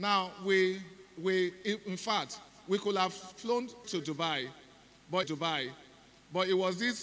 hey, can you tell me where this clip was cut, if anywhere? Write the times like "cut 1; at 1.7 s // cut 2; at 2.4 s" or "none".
cut 1; at 3.8 s // cut 2; at 5.2 s